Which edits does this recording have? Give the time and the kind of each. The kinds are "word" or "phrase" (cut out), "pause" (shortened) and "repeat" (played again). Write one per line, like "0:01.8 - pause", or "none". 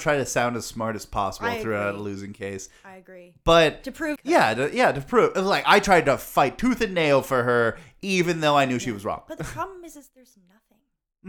0:04.2 - phrase